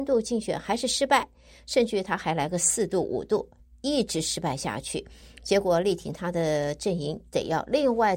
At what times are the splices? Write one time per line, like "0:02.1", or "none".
none